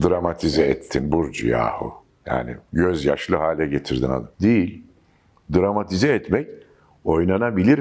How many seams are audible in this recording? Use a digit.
1